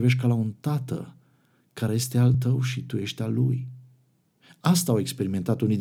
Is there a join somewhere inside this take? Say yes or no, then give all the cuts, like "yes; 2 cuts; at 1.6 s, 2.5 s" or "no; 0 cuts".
no; 0 cuts